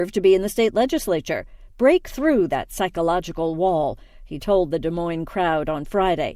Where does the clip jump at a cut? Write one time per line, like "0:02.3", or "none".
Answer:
none